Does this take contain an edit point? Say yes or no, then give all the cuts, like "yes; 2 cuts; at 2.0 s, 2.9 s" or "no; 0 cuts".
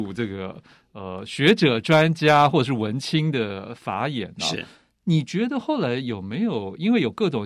no; 0 cuts